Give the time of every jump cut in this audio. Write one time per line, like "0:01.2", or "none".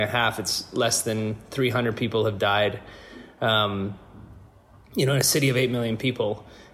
none